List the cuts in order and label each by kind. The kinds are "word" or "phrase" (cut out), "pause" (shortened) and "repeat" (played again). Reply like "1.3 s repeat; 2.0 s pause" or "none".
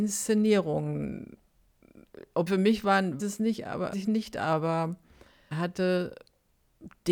2.5 s word; 3.2 s word; 3.9 s word; 5.5 s word